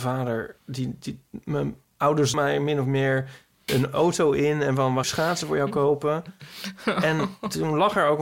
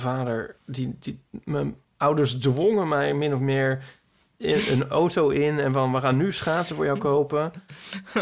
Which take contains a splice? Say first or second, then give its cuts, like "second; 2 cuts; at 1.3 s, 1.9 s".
first; 3 cuts; at 2.3 s, 3.7 s, 5.0 s